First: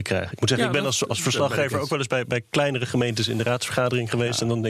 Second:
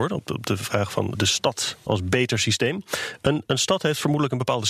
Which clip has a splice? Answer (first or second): second